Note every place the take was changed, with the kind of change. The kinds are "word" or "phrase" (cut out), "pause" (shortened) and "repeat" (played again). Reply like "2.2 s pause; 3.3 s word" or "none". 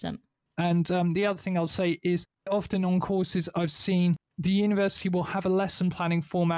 2.5 s word; 4.3 s pause